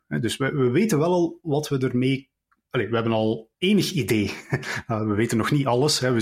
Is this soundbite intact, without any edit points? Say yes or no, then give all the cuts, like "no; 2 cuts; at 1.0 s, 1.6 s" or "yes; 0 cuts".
no; 1 cut; at 3.5 s